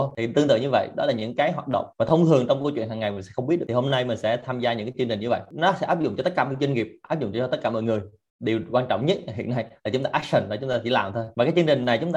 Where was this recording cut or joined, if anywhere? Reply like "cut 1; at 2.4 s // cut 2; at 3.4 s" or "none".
cut 1; at 1.9 s